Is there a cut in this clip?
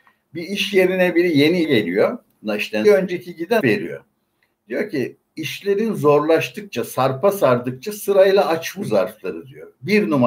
yes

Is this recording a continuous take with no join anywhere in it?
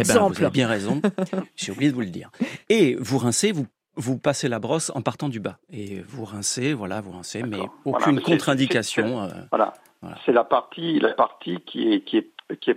yes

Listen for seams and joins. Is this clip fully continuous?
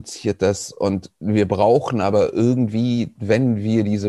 yes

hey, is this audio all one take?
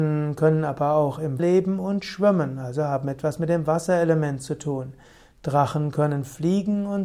no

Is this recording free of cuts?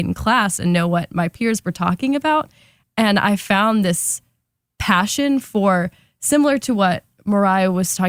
yes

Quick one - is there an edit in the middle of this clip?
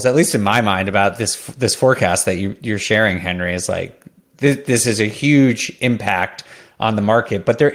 no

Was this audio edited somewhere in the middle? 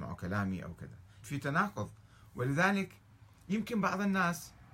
yes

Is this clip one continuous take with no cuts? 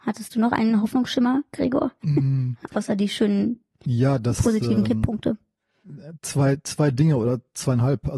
yes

